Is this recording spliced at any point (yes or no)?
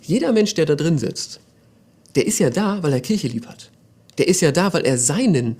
no